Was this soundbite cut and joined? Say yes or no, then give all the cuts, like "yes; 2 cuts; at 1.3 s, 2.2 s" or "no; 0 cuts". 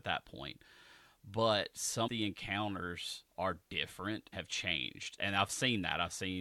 yes; 4 cuts; at 2.1 s, 3.3 s, 4.3 s, 5.2 s